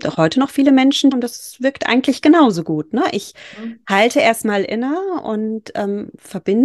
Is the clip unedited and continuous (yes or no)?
no